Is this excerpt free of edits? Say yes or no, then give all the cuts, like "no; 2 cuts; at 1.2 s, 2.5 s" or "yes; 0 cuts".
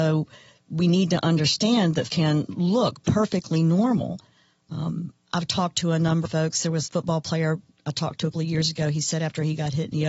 no; 4 cuts; at 2.1 s, 6.2 s, 6.9 s, 8.3 s